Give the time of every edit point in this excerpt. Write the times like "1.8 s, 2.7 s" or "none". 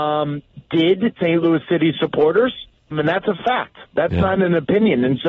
1.2 s, 2.9 s, 4.4 s